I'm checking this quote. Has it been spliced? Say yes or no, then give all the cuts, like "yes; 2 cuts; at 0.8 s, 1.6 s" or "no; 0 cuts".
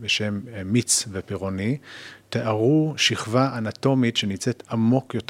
no; 0 cuts